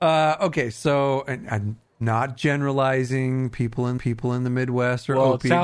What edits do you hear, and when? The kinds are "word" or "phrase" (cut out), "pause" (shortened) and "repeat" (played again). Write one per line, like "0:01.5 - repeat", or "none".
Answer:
0:04.0 - repeat